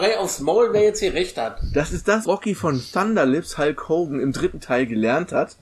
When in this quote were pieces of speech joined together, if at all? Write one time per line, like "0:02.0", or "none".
0:02.2